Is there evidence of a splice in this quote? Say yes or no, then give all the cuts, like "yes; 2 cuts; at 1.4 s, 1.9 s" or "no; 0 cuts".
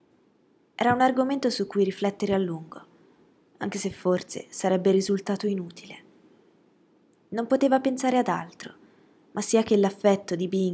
no; 0 cuts